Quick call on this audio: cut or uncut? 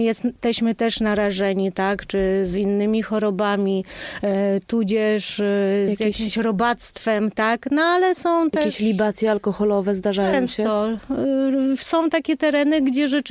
uncut